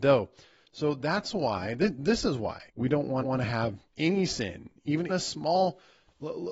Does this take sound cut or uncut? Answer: cut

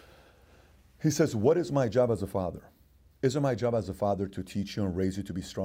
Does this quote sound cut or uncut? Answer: uncut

